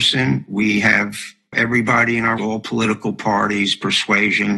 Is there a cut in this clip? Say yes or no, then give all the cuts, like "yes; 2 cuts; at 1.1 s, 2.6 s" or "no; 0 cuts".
yes; 2 cuts; at 1.5 s, 2.4 s